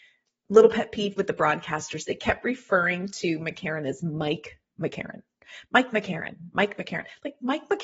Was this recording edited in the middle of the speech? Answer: yes; 1 cut; at 1.2 s

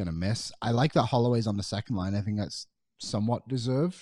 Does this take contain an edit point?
no; 0 cuts

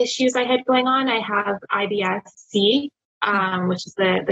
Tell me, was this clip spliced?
yes; 1 cut; at 2.3 s

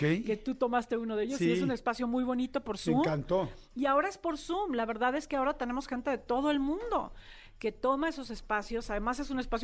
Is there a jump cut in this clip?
no; 0 cuts

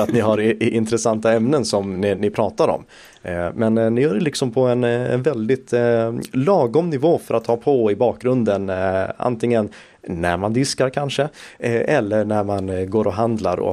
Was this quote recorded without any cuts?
yes; 0 cuts

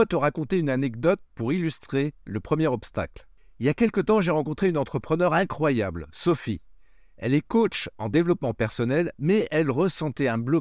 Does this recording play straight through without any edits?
yes; 0 cuts

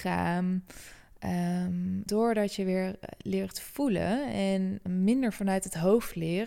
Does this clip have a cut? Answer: yes; 2 cuts; at 2.1 s, 4.9 s

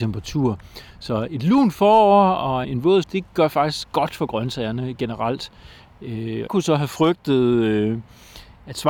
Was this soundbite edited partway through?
yes; 4 cuts; at 1.3 s, 2.6 s, 3.0 s, 6.5 s

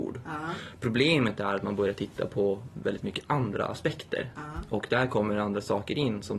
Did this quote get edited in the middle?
no; 0 cuts

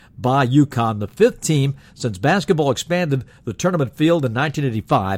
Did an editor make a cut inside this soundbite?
no; 0 cuts

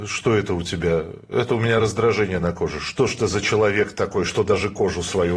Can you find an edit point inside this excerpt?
no; 0 cuts

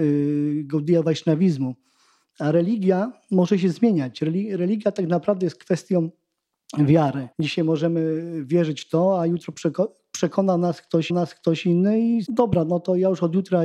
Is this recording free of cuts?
no; 3 cuts; at 7.3 s, 11.1 s, 12.3 s

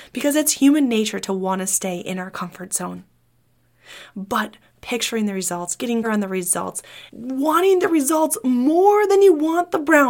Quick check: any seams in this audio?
yes; 2 cuts; at 6.0 s, 7.1 s

